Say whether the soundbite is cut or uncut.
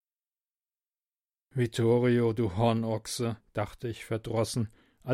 cut